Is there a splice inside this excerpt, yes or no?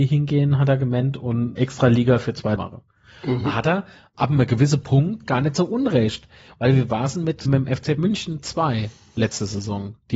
yes